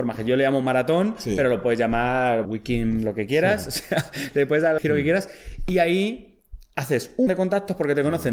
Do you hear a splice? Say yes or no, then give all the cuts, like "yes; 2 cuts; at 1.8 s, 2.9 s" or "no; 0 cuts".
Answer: yes; 3 cuts; at 2.4 s, 4.8 s, 7.3 s